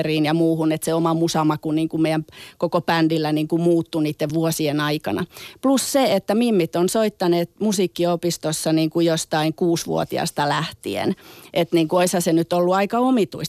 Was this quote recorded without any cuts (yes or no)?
yes